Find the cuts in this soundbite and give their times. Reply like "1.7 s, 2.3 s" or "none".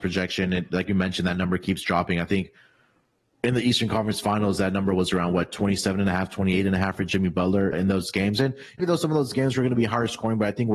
7.7 s, 8.8 s